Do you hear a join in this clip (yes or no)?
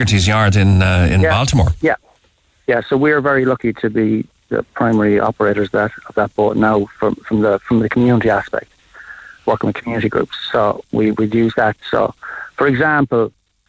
no